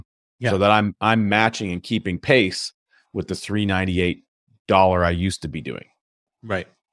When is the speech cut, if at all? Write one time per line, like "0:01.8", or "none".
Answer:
none

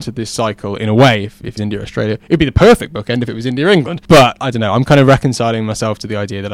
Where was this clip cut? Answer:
0:01.6

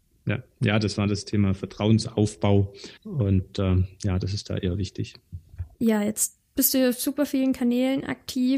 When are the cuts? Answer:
0:03.0
0:05.7

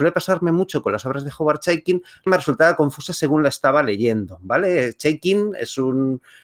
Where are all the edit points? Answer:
0:02.3

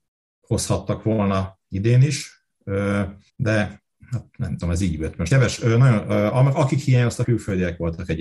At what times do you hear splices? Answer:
0:03.3
0:05.3
0:07.2

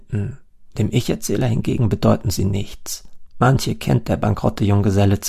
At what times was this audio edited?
none

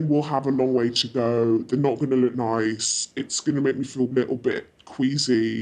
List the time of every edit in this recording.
none

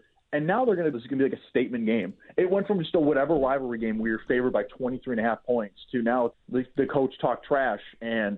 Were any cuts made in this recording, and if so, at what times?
0:00.9
0:06.3

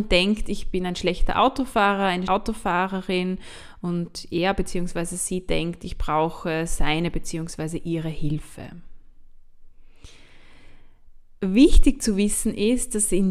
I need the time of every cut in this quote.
0:02.3

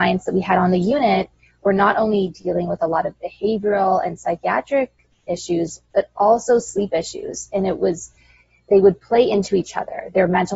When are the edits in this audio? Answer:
none

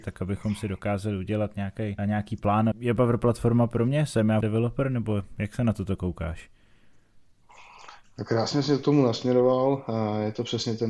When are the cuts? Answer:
0:02.0
0:02.7
0:04.4

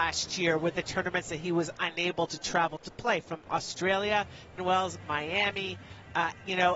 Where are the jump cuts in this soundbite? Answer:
0:04.6

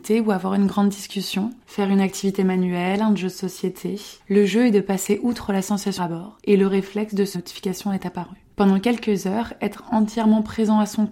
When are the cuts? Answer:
0:01.6
0:04.2
0:06.0
0:06.4
0:07.3
0:08.5

